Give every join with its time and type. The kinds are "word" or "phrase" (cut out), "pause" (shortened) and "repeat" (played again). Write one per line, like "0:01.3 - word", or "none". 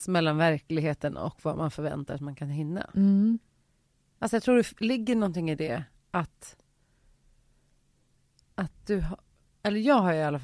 none